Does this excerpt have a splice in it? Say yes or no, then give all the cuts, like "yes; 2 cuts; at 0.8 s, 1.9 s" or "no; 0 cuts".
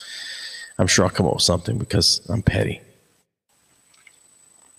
no; 0 cuts